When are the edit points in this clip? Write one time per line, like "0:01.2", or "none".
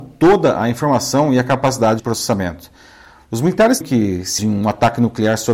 0:02.0
0:03.8
0:04.4